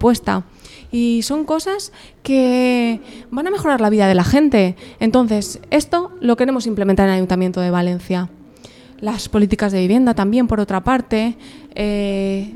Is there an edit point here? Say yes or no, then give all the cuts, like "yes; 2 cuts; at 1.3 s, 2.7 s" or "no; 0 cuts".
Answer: no; 0 cuts